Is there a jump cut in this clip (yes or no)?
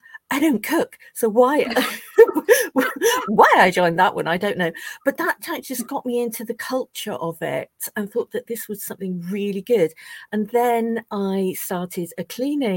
no